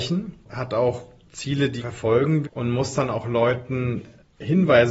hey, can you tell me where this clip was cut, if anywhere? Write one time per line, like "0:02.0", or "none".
0:01.8
0:02.4